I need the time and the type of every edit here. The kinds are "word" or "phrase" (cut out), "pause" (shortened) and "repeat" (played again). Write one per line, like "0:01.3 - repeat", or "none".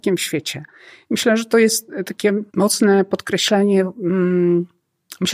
0:02.5 - pause